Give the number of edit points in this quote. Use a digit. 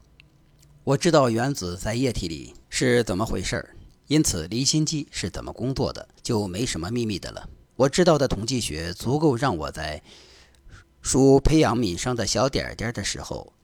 4